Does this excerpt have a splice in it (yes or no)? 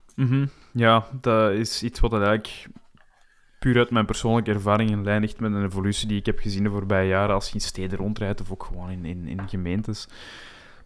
no